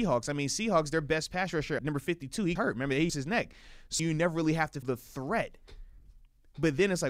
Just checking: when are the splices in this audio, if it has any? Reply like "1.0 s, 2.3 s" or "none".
1.8 s, 2.6 s, 3.1 s, 4.0 s, 4.8 s